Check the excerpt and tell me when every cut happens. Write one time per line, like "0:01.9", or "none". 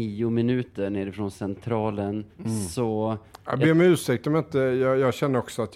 0:02.3